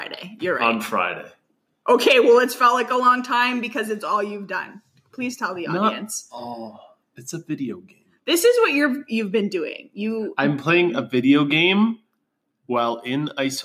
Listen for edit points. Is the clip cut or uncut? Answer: uncut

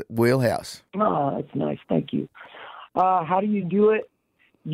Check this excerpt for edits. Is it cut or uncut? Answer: uncut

